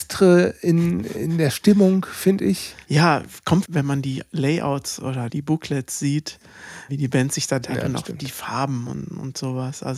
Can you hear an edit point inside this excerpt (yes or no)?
yes